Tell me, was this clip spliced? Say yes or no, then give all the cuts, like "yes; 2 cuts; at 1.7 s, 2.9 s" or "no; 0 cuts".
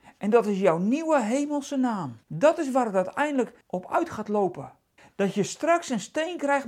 yes; 3 cuts; at 2.2 s, 3.6 s, 5.0 s